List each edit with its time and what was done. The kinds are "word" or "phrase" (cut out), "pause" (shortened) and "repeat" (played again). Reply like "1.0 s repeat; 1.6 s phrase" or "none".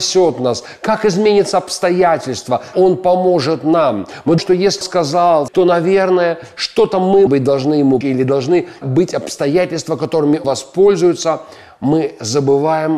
2.7 s word; 4.4 s word; 4.8 s word; 5.5 s word; 7.3 s word; 8.0 s word; 8.8 s word; 10.4 s word